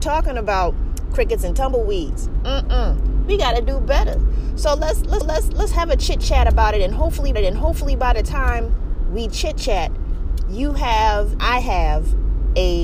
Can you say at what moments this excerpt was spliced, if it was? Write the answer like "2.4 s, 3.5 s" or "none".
5.2 s, 7.3 s, 11.4 s